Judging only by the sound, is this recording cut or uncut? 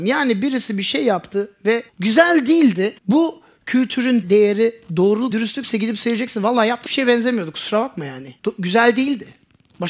cut